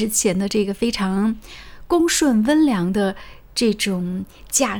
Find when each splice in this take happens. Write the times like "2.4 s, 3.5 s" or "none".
none